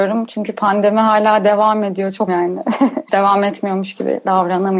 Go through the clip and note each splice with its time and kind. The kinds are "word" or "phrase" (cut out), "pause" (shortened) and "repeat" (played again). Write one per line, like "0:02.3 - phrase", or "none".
0:02.3 - word